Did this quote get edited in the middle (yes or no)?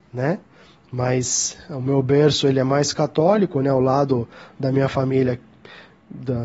no